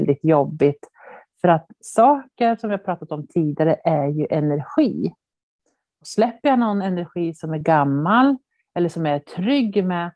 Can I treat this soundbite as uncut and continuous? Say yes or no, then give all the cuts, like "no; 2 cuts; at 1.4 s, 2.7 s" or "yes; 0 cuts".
yes; 0 cuts